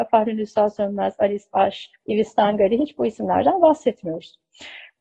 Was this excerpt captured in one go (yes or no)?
no